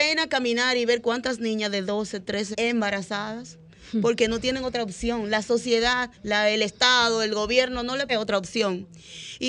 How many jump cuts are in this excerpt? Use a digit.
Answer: 3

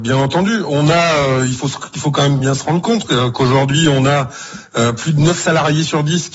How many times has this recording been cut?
0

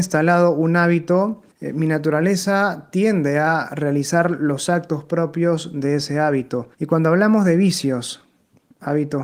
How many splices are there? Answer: 2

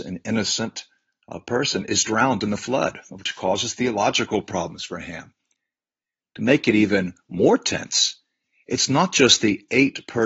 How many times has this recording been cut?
0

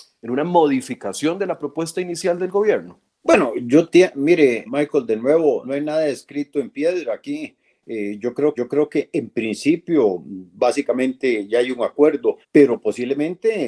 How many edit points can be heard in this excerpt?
5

